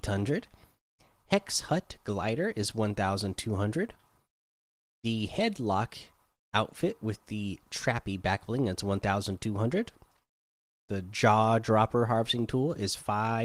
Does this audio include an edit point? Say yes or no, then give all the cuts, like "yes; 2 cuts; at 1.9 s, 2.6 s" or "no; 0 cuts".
no; 0 cuts